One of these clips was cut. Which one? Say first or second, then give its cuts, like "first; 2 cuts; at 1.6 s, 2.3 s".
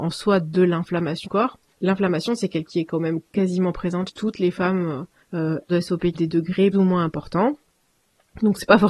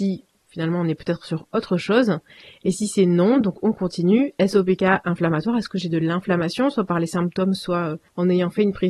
first; 7 cuts; at 1.2 s, 2.7 s, 3.3 s, 4.1 s, 5.7 s, 6.1 s, 6.7 s